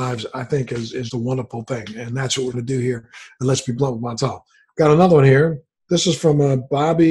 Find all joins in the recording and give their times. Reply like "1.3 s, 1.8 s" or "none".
1.1 s, 2.5 s